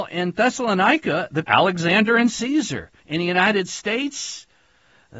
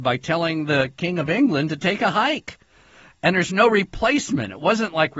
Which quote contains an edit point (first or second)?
first